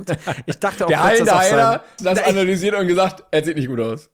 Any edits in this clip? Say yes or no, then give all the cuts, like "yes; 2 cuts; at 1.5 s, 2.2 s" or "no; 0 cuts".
yes; 1 cut; at 2.0 s